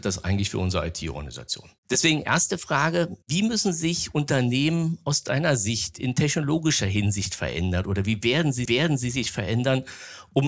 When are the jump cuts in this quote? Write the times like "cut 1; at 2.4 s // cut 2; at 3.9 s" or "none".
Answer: cut 1; at 1.8 s // cut 2; at 3.2 s // cut 3; at 8.6 s